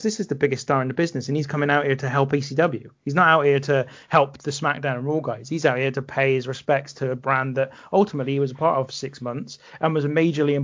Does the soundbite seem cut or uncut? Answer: uncut